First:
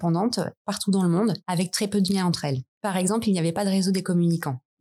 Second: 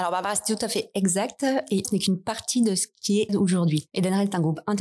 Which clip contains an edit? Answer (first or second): second